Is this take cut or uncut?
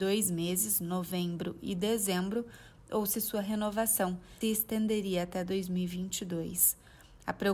cut